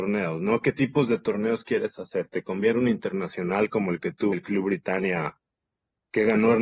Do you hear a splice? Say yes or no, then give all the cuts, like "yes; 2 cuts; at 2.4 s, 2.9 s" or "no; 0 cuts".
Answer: yes; 2 cuts; at 2.7 s, 4.3 s